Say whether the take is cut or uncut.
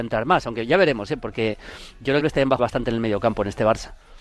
cut